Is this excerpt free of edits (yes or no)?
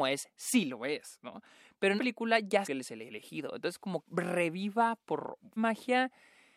no